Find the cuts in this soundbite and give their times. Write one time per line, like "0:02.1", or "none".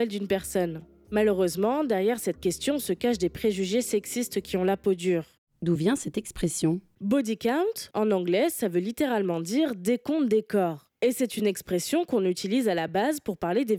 none